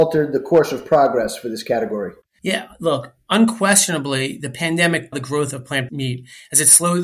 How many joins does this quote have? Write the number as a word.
three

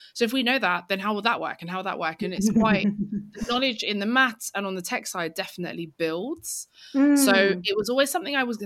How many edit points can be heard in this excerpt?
zero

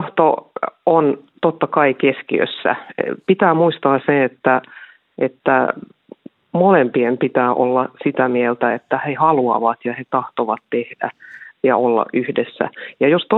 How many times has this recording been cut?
zero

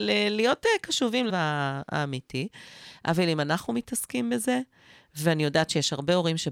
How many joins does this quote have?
one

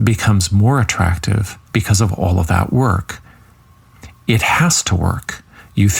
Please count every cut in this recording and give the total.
one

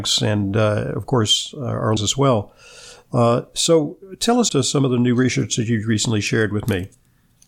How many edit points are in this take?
two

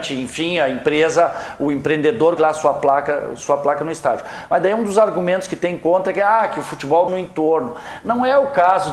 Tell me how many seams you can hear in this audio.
two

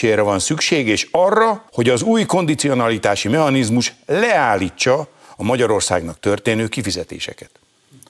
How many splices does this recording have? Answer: one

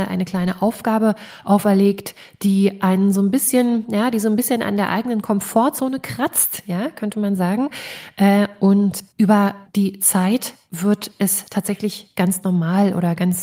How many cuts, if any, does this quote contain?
one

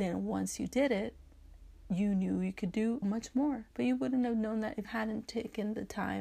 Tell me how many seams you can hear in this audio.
three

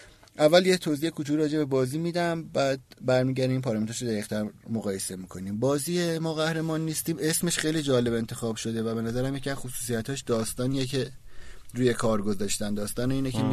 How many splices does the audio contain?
zero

